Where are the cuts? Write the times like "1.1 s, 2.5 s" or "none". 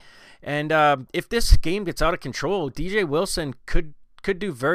1.1 s

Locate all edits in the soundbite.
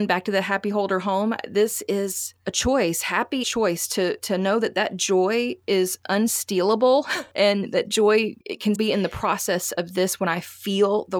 3.4 s, 8.4 s, 8.8 s

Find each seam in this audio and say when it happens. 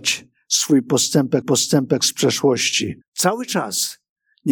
1.4 s, 3.0 s

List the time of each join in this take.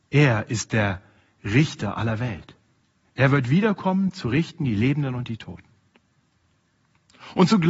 none

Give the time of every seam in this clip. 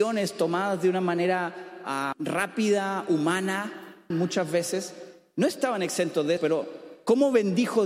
2.1 s, 4.1 s, 6.4 s

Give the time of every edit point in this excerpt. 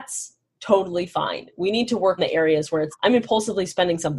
2.2 s, 2.9 s

